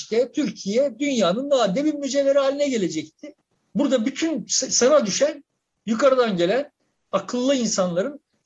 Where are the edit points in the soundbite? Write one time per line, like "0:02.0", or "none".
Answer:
none